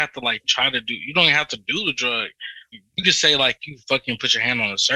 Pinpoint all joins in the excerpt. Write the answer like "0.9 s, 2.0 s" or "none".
2.7 s